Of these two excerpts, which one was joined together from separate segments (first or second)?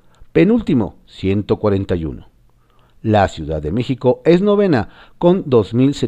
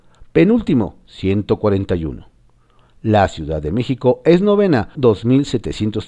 second